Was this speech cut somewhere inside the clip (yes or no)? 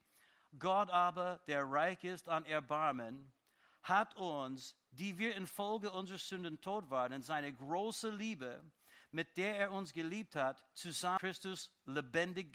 no